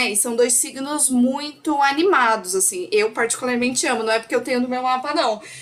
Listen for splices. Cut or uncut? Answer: uncut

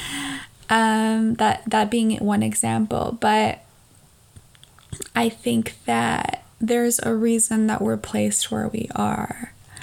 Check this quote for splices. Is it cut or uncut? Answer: cut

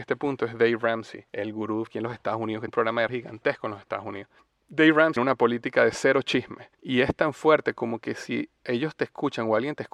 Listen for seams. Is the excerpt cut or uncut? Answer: cut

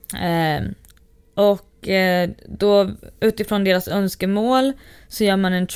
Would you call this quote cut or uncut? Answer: uncut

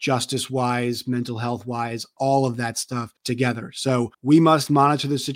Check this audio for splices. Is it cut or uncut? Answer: cut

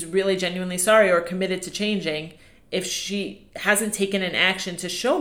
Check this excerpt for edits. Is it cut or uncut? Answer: uncut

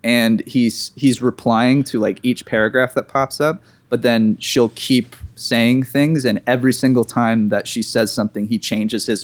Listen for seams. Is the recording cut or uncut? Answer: uncut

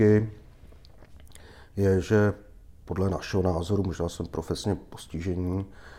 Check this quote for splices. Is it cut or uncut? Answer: uncut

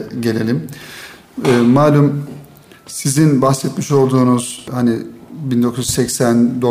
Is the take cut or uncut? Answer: uncut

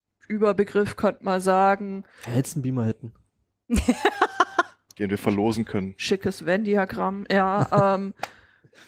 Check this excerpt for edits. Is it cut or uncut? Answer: uncut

